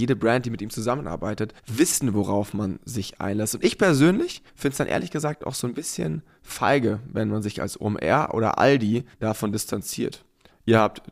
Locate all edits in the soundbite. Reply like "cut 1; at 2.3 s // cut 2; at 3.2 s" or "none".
cut 1; at 1.6 s // cut 2; at 4.5 s // cut 3; at 9.1 s